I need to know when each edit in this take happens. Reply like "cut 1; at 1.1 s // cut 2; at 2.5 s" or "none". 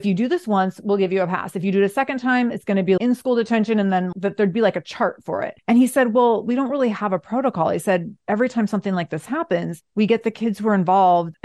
cut 1; at 3.0 s // cut 2; at 4.1 s